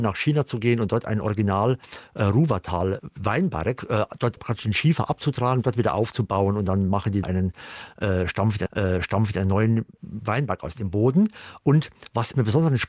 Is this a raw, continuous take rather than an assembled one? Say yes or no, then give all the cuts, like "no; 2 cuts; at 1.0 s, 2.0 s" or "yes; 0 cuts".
no; 3 cuts; at 4.4 s, 7.2 s, 8.7 s